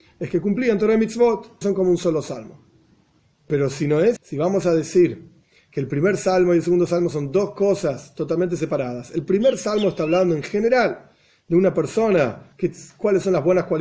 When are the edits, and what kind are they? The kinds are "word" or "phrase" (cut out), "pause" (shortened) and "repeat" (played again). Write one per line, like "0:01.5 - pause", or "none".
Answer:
0:01.6 - word
0:04.2 - word